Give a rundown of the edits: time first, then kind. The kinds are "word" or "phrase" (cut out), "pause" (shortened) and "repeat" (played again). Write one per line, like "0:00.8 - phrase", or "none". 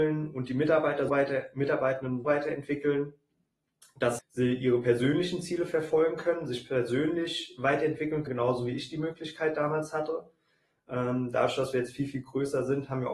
0:01.1 - word
0:02.2 - word
0:04.2 - word
0:08.3 - word